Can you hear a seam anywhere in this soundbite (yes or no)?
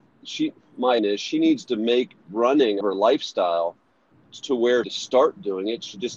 yes